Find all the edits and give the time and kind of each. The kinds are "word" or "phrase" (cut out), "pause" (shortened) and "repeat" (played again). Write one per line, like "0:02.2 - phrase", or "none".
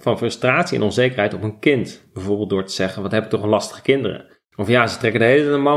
0:04.4 - pause